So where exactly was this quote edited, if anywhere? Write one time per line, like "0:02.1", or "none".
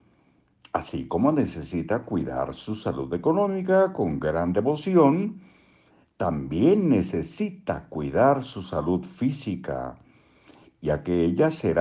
none